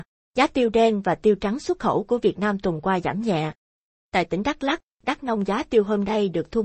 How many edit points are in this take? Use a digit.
0